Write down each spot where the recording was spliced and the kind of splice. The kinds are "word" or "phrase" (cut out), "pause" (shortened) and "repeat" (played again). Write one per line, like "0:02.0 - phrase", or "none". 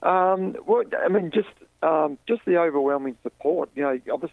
0:02.2 - pause